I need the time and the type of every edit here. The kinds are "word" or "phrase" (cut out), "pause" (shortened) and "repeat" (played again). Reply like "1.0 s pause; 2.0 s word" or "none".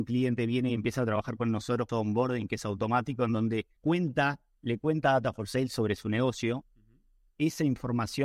1.9 s phrase; 3.8 s pause

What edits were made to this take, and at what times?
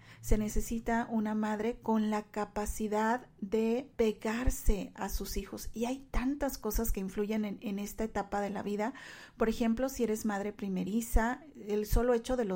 3.9 s pause

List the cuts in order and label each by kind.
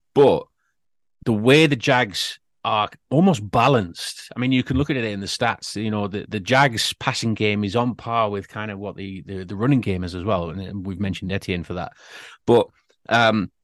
6.3 s word

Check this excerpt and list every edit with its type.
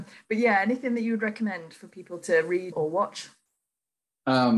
2.7 s word

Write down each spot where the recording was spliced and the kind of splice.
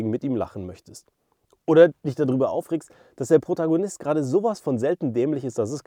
none

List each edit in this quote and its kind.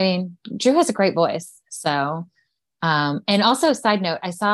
none

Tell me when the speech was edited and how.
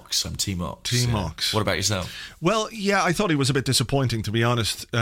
none

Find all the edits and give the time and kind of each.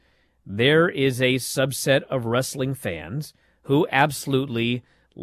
none

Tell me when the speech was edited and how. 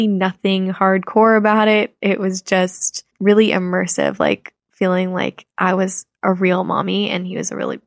3.1 s pause

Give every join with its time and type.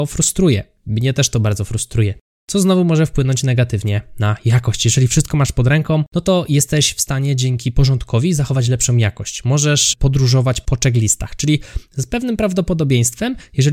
none

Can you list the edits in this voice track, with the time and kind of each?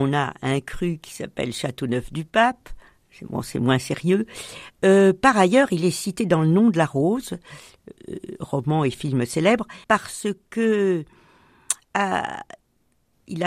9.8 s pause

